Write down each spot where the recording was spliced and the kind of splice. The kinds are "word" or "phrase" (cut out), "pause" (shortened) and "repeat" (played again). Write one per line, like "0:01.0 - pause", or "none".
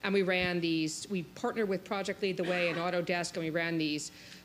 none